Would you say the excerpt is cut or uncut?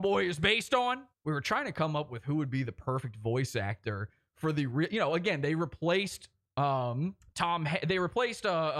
cut